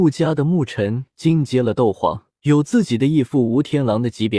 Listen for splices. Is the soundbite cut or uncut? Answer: cut